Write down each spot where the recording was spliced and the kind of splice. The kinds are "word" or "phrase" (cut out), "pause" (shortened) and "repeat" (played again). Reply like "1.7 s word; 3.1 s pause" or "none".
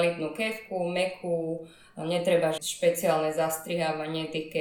2.6 s word